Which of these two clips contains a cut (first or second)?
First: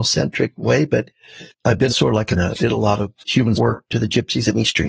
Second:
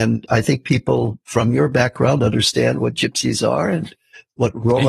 first